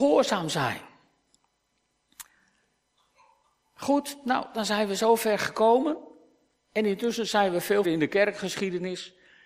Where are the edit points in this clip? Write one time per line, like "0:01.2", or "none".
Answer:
0:07.8